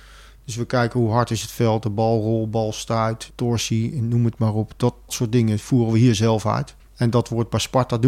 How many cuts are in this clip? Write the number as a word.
three